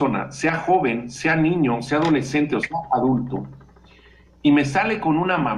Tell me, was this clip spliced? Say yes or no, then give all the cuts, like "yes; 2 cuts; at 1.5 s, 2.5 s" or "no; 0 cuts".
no; 0 cuts